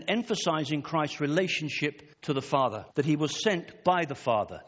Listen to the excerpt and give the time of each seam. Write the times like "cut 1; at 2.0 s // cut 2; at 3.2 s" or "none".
cut 1; at 2.1 s // cut 2; at 2.9 s